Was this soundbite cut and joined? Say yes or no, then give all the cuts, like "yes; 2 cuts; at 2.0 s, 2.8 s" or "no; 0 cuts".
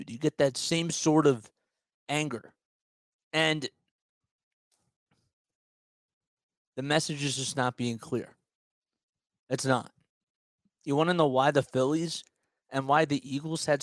no; 0 cuts